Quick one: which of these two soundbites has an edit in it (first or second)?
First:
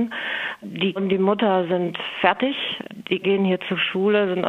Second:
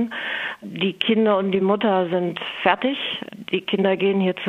first